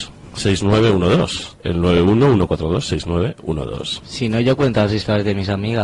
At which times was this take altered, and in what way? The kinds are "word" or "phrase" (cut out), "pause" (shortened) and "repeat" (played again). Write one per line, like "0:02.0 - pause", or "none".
0:01.6 - pause